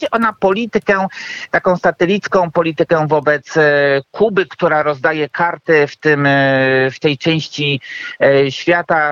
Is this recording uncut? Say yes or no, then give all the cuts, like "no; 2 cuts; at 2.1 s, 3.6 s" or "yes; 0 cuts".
yes; 0 cuts